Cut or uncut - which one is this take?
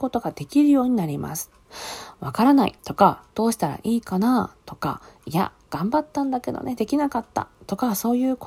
cut